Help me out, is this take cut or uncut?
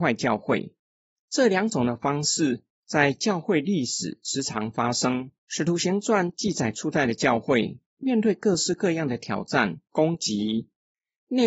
cut